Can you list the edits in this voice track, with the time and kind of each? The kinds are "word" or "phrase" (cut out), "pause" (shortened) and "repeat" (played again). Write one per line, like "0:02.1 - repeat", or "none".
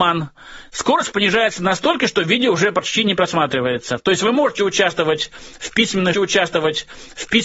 0:06.1 - repeat